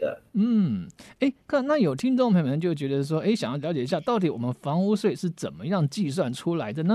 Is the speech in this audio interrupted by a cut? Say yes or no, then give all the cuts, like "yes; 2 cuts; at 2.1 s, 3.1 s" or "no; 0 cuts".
no; 0 cuts